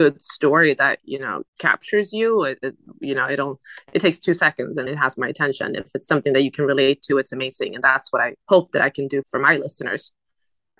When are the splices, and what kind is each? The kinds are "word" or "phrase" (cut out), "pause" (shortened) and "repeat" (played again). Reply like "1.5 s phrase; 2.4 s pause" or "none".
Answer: 1.5 s pause; 4.9 s word; 8.4 s pause; 9.2 s word